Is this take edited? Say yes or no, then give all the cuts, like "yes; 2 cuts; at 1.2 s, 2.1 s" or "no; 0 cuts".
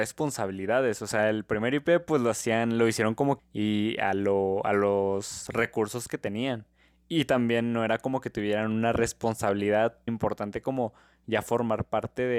yes; 2 cuts; at 3.4 s, 10.1 s